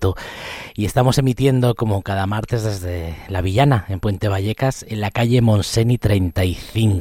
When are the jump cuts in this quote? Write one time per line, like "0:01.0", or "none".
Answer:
none